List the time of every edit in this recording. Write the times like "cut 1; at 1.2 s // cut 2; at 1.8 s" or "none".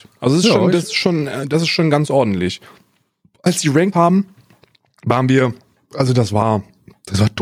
cut 1; at 3.9 s